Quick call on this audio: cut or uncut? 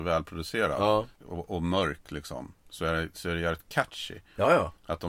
cut